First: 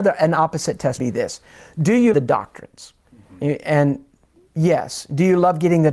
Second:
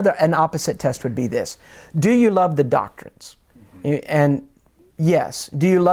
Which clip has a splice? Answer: first; 2 cuts; at 1.0 s, 2.1 s

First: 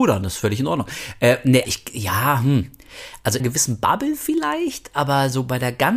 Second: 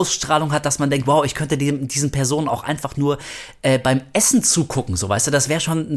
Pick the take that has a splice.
first; 2 cuts; at 1.6 s, 3.4 s

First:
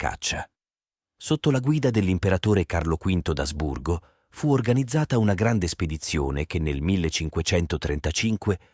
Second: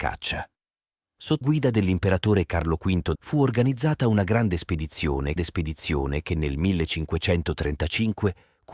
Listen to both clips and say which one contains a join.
second; 3 cuts; at 1.4 s, 3.2 s, 5.4 s

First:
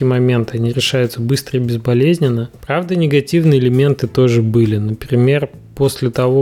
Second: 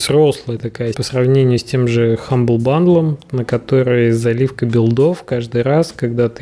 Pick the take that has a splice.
second; 1 cut; at 0.9 s

